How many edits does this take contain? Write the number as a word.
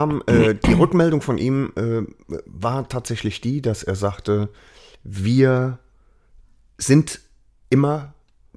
zero